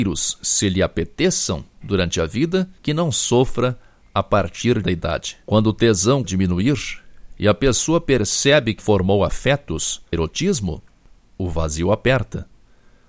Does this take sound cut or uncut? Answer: cut